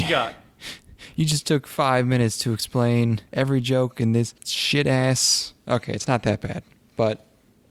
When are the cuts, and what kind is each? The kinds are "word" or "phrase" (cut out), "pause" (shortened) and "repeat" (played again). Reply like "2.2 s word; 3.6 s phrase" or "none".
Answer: 3.3 s pause; 4.4 s pause